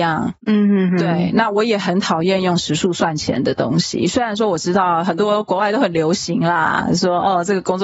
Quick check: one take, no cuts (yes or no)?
yes